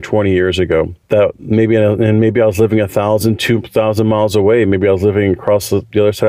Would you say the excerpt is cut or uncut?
cut